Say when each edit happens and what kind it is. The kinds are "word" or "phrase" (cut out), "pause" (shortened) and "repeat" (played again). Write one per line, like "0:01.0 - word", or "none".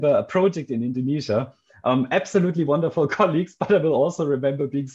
none